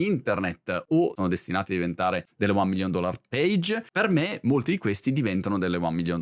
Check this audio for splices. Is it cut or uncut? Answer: uncut